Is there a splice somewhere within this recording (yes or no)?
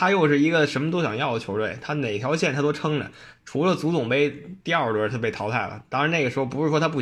yes